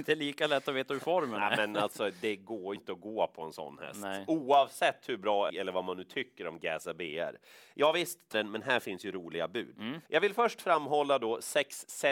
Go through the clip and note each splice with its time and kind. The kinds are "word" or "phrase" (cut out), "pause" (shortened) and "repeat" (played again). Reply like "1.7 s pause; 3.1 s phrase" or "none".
2.8 s word; 5.5 s phrase; 8.3 s word; 10.1 s pause